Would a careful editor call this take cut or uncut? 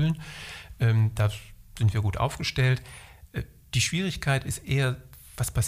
uncut